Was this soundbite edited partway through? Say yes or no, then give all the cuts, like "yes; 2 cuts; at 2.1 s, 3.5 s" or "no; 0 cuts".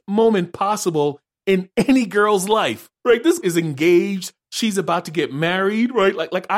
yes; 2 cuts; at 2.9 s, 3.4 s